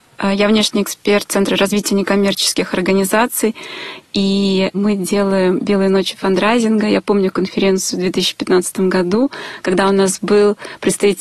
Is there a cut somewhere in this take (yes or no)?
no